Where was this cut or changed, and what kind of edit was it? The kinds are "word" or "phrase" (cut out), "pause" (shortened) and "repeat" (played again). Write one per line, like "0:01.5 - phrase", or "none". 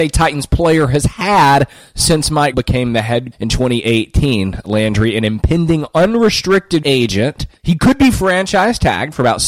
0:02.5 - word
0:03.3 - word
0:06.8 - word
0:07.6 - pause